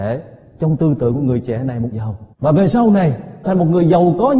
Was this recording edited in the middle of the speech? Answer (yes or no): yes